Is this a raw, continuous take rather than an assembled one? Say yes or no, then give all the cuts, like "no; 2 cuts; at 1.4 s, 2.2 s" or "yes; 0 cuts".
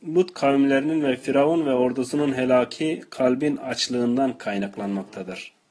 yes; 0 cuts